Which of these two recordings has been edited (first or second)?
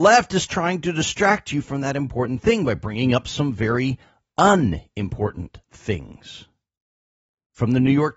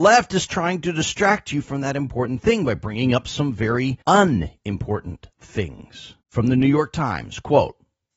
second